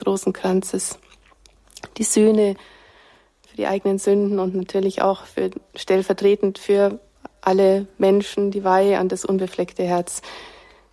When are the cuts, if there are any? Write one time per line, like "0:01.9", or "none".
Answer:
none

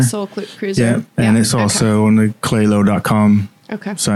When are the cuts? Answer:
none

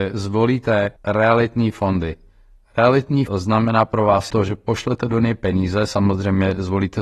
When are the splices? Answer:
0:01.0
0:03.3
0:04.3

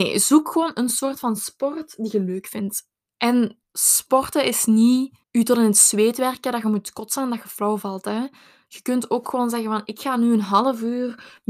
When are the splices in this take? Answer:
0:03.6
0:05.2

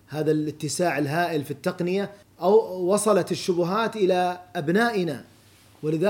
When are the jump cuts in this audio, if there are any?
0:02.2

